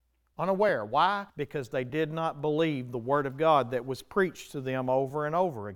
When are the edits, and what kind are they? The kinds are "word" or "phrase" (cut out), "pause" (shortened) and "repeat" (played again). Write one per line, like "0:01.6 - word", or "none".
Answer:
0:01.3 - pause